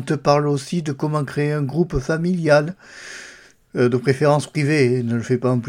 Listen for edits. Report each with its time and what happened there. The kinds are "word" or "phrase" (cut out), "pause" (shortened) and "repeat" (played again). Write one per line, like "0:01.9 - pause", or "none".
none